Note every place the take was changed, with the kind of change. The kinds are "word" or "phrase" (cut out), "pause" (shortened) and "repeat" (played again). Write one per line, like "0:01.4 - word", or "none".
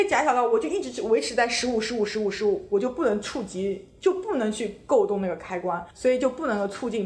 0:05.9 - pause